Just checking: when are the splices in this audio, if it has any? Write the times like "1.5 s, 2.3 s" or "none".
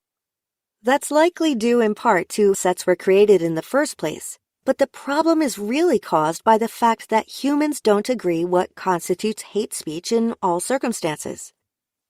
2.5 s